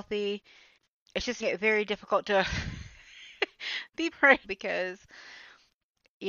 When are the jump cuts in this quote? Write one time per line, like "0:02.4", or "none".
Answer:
0:01.4
0:04.1
0:04.4